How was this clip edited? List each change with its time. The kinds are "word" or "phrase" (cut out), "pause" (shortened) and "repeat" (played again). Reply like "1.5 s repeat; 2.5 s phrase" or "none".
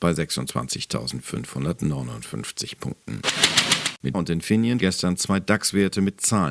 4.1 s word; 4.8 s word